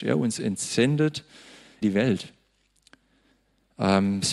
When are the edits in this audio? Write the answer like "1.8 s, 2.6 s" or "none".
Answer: 1.8 s